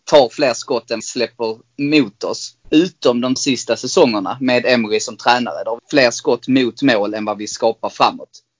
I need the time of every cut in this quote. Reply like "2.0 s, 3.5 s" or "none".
1.0 s, 2.6 s, 3.4 s, 5.8 s